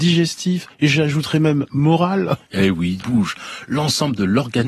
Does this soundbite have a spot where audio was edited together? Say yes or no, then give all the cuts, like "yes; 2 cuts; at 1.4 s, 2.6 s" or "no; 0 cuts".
yes; 1 cut; at 3.0 s